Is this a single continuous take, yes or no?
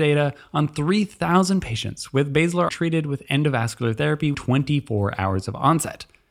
no